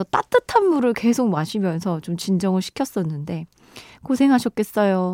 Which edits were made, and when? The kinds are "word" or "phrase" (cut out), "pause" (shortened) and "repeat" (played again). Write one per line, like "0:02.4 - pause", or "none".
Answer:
none